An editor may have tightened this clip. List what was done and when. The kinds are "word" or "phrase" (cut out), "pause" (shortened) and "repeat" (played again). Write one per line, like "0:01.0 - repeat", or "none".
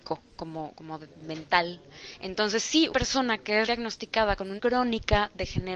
0:02.9 - word
0:03.7 - word
0:04.6 - word